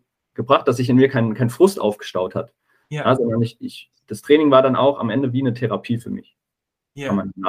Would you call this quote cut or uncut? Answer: uncut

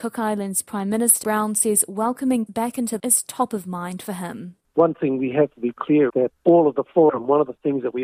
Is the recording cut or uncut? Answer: cut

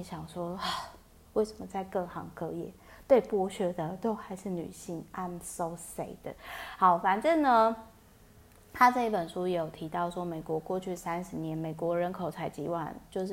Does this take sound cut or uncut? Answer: uncut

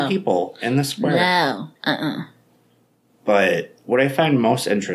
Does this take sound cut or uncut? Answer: cut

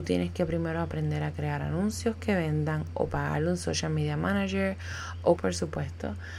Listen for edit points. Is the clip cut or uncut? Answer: cut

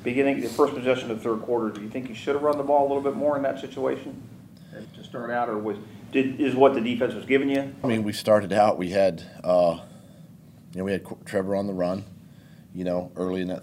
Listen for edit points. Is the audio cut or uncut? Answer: cut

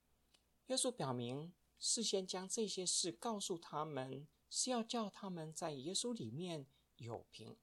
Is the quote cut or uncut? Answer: cut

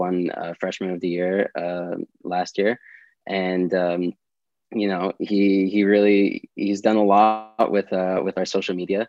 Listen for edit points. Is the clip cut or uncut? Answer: uncut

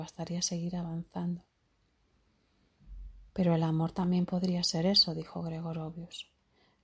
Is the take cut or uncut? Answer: uncut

